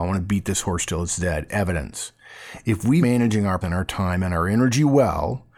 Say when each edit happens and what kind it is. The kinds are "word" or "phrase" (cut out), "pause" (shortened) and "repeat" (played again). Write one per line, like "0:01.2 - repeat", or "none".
0:01.5 - word
0:03.0 - word
0:03.6 - word